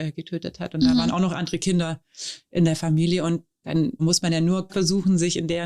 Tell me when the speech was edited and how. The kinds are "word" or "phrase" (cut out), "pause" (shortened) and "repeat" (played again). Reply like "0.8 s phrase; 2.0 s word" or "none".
4.0 s word; 4.7 s phrase